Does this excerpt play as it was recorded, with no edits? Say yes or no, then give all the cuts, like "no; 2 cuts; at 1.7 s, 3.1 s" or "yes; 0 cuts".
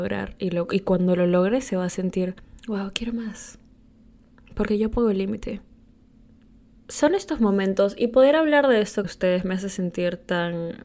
no; 1 cut; at 9.0 s